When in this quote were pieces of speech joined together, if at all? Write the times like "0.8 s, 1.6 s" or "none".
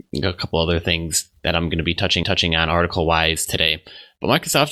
2.2 s